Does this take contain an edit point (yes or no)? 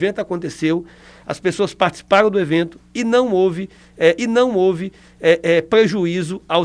yes